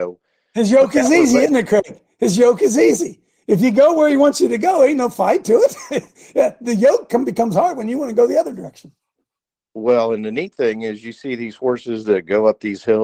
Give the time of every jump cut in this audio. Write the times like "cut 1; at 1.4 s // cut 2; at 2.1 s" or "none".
none